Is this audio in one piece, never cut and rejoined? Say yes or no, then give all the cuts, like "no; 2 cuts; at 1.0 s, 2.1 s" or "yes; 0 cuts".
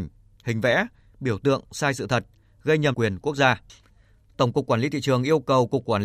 no; 1 cut; at 2.9 s